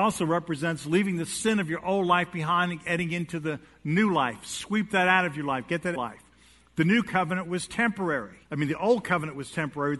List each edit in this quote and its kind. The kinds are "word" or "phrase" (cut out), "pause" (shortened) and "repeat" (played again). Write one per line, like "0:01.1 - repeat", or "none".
0:06.0 - phrase
0:08.5 - pause